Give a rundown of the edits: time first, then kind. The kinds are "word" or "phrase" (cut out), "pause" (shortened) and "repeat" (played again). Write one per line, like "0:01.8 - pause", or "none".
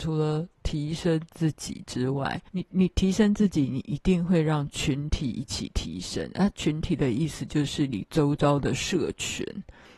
0:02.5 - pause